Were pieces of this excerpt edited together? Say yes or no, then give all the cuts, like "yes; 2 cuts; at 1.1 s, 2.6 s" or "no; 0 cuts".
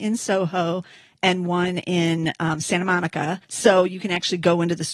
yes; 1 cut; at 3.4 s